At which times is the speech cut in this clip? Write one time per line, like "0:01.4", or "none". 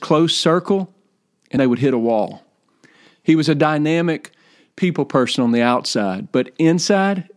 0:01.6

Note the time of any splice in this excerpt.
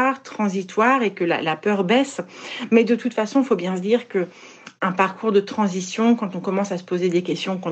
none

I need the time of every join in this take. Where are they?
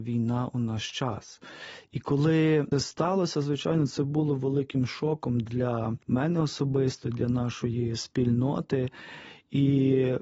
0:02.7
0:06.0

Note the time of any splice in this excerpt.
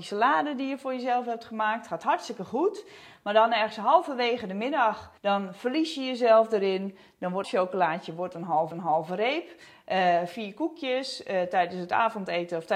0:05.2
0:07.4
0:08.7

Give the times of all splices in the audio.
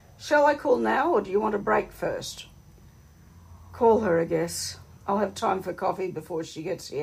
none

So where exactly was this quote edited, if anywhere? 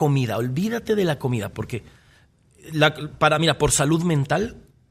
none

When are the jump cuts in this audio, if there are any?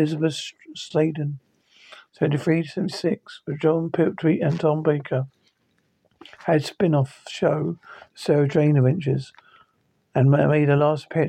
none

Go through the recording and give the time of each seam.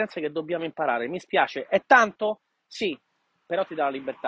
none

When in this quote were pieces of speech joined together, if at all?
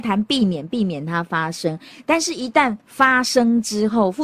0:02.8

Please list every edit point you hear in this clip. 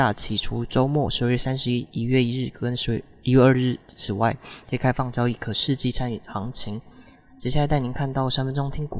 none

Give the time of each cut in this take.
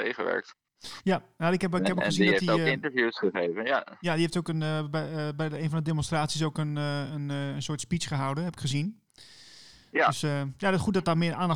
none

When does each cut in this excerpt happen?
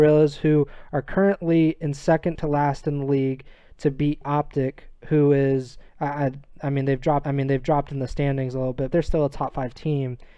0:05.9
0:07.2
0:08.9

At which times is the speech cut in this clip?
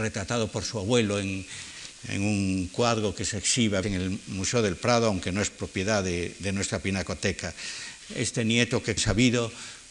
0:03.8
0:09.0

